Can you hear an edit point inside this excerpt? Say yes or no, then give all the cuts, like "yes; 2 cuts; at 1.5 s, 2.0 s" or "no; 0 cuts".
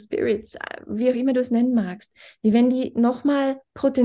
no; 0 cuts